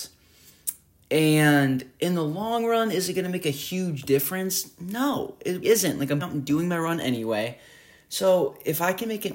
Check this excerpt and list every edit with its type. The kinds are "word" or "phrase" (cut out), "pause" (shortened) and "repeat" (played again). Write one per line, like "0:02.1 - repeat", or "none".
0:05.6 - word
0:06.2 - word